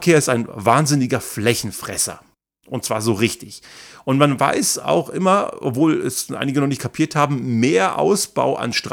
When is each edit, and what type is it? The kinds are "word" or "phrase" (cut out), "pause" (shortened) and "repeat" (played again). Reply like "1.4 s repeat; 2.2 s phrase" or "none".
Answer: none